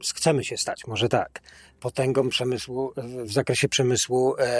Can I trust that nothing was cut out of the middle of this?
yes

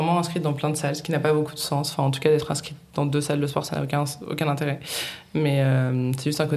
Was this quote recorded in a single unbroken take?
yes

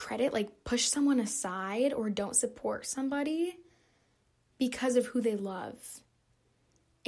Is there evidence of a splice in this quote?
no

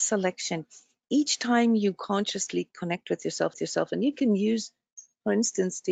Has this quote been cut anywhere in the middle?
yes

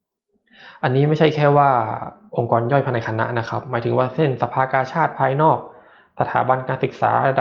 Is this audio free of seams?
yes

